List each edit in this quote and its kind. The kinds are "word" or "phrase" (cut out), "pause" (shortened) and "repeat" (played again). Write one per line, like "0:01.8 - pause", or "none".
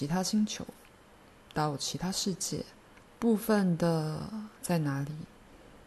0:02.9 - pause
0:04.6 - pause

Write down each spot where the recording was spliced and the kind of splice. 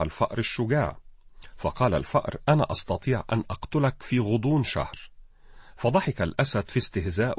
none

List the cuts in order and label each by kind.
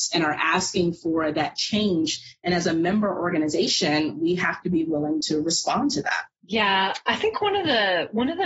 none

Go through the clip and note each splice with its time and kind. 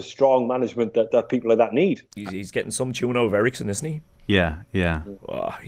0:01.1 - word
0:02.1 - pause

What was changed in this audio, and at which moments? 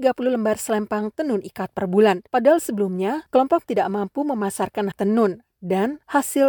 0:02.3 - pause
0:03.6 - word
0:04.9 - word

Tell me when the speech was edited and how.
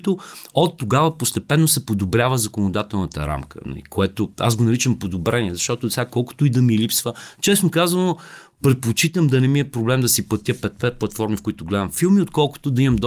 none

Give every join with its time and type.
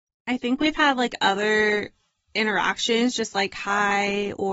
none

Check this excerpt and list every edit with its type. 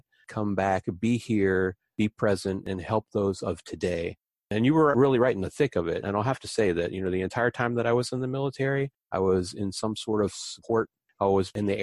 none

